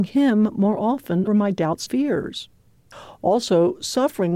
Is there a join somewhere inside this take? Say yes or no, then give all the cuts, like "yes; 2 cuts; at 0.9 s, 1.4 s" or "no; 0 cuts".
yes; 2 cuts; at 1.3 s, 1.9 s